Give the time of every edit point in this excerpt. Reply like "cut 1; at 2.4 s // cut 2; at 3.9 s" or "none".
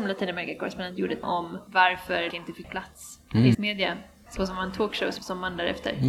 cut 1; at 1.2 s // cut 2; at 2.3 s // cut 3; at 2.6 s // cut 4; at 3.5 s // cut 5; at 4.4 s // cut 6; at 5.2 s